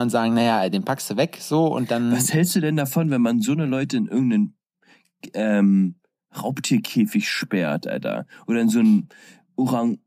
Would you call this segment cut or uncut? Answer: uncut